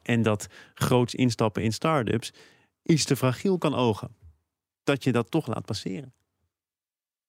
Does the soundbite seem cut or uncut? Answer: uncut